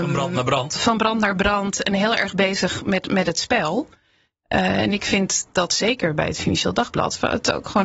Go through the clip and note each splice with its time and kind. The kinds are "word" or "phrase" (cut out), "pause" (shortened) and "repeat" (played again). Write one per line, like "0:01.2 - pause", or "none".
none